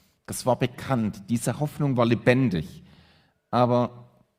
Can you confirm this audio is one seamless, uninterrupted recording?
yes; 0 cuts

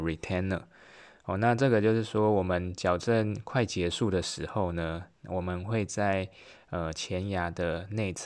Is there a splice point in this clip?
yes; 1 cut; at 5.1 s

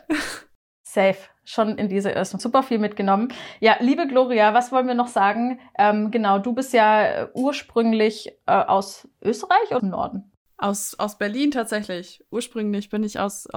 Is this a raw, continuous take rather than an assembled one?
no; 4 cuts; at 1.8 s, 2.4 s, 9.1 s, 9.8 s

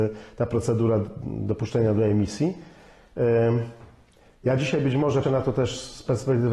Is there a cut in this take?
yes; 1 cut; at 5.2 s

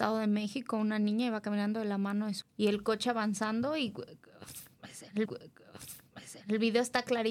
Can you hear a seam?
yes; 2 cuts; at 2.4 s, 5.3 s

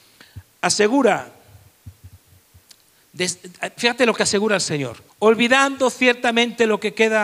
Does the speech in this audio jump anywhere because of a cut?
yes; 1 cut; at 5.1 s

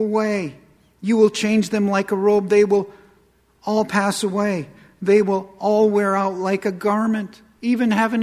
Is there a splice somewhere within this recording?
no; 0 cuts

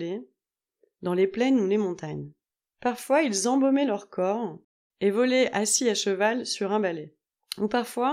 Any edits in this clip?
no; 0 cuts

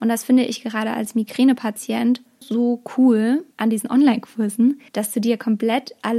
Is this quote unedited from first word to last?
no; 3 cuts; at 2.4 s, 3.5 s, 4.9 s

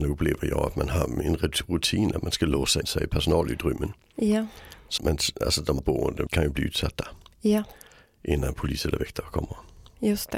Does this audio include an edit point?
yes; 4 cuts; at 2.8 s, 5.0 s, 5.8 s, 6.3 s

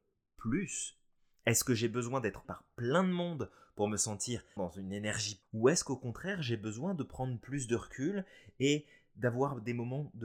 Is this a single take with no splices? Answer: no; 3 cuts; at 2.4 s, 4.6 s, 5.4 s

